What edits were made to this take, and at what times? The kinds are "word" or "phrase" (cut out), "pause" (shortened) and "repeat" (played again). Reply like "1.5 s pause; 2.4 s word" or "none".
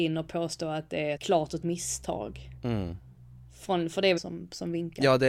1.2 s word; 1.6 s word; 4.2 s word